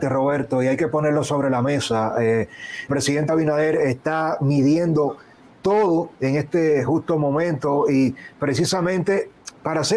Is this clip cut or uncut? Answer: cut